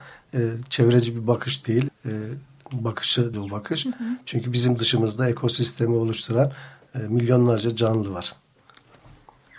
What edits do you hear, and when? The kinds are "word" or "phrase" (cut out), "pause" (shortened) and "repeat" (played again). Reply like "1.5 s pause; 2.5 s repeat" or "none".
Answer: 1.9 s word; 3.3 s word